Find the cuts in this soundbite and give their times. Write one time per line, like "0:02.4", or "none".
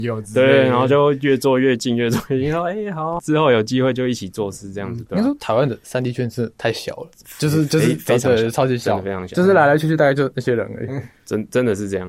0:03.2